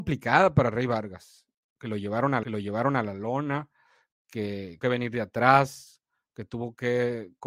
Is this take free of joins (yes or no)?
no